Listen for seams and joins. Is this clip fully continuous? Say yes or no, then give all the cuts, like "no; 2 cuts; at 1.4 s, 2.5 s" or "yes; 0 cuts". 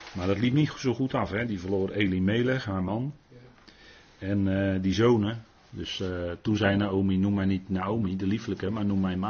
yes; 0 cuts